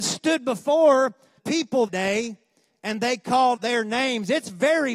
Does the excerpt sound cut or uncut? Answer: cut